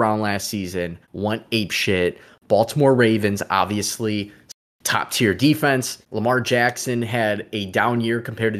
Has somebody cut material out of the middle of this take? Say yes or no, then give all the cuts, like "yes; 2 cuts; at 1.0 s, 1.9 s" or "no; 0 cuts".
yes; 2 cuts; at 1.0 s, 6.0 s